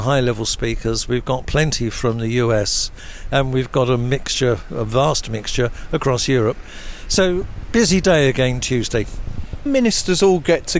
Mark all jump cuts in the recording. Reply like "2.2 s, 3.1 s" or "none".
9.7 s

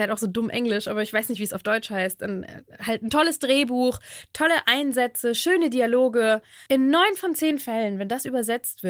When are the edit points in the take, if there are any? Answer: 6.7 s

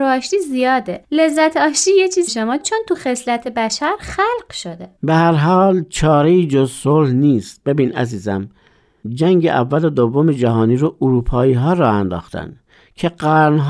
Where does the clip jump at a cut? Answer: 1.0 s, 2.3 s, 5.0 s

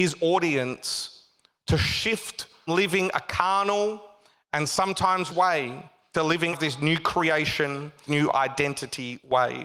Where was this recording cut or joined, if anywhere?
2.7 s, 5.3 s, 6.1 s, 6.5 s, 8.1 s

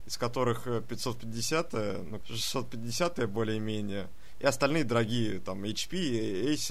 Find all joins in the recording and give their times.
2.2 s

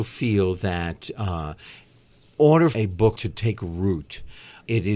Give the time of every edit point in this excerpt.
2.4 s, 2.7 s, 3.1 s

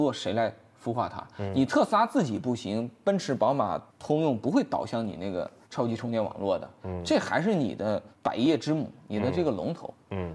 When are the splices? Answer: 3.9 s, 5.6 s, 8.1 s

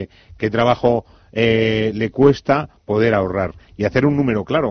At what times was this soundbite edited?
none

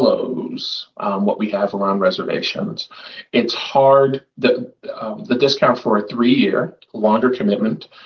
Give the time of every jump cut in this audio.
6.9 s

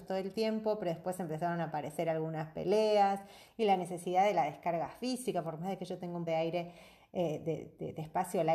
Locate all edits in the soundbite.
6.3 s

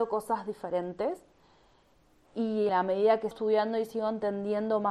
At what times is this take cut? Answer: 2.7 s, 3.3 s

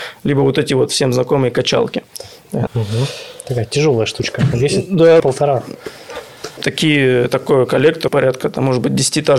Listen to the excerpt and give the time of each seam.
2.7 s, 5.2 s, 8.1 s

